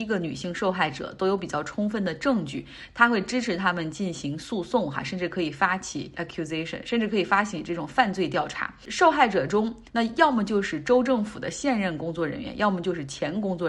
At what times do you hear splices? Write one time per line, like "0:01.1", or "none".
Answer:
0:06.1
0:09.9